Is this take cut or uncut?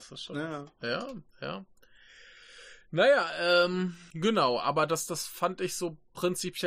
cut